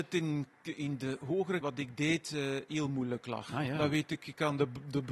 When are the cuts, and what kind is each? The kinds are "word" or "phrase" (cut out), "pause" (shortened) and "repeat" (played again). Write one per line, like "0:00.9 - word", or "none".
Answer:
0:01.6 - word